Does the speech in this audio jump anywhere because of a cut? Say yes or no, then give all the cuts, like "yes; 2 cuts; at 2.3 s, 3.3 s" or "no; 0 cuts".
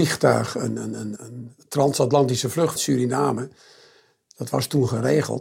yes; 2 cuts; at 1.2 s, 2.8 s